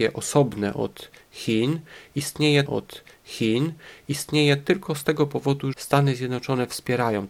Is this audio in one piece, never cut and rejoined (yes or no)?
no